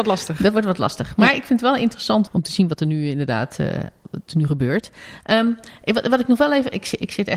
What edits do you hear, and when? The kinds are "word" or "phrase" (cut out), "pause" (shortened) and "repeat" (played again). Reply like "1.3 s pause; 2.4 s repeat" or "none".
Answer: 2.3 s word